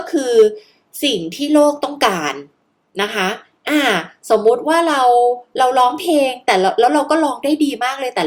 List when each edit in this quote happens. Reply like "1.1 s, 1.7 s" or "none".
none